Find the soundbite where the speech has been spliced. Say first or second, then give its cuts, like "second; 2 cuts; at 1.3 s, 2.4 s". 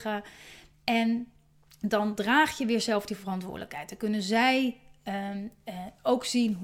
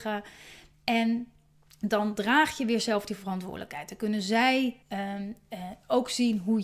second; 1 cut; at 4.8 s